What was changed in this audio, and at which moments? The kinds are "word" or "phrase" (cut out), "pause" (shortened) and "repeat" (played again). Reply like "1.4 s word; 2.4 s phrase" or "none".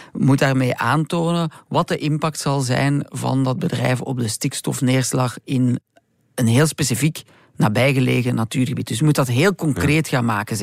none